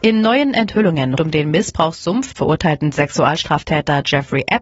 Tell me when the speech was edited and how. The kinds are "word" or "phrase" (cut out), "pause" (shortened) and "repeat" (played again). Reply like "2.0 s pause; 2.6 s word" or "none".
1.2 s word; 2.3 s word